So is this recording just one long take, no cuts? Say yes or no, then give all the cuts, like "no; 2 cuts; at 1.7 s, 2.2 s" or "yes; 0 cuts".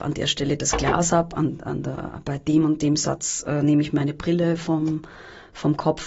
yes; 0 cuts